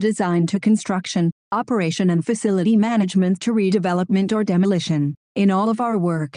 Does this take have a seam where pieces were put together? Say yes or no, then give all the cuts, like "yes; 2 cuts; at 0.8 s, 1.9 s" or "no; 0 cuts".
no; 0 cuts